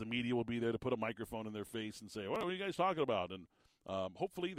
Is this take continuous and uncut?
yes; 0 cuts

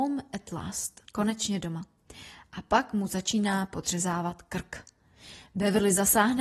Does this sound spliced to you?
yes; 1 cut; at 1.0 s

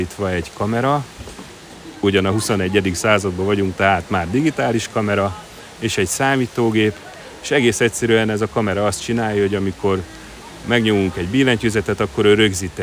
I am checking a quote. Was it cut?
no; 0 cuts

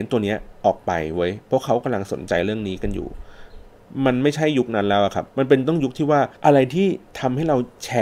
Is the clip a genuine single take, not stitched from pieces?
no; 2 cuts; at 5.3 s, 6.4 s

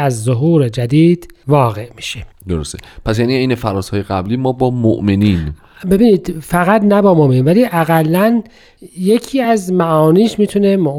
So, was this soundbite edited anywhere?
no; 0 cuts

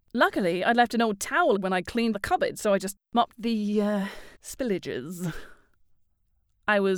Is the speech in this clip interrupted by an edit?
yes; 4 cuts; at 1.6 s, 2.1 s, 3.3 s, 4.3 s

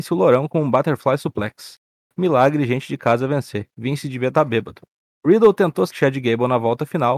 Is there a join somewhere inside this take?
yes; 1 cut; at 5.9 s

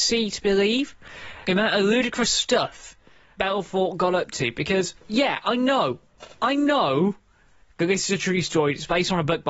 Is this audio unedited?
no; 3 cuts; at 1.4 s, 3.4 s, 5.0 s

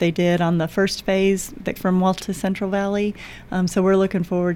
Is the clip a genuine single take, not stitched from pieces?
no; 2 cuts; at 1.8 s, 2.2 s

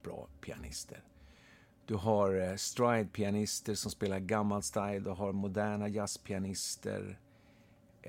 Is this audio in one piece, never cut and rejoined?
yes; 0 cuts

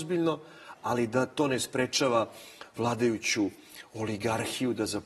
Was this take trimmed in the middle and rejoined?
no; 0 cuts

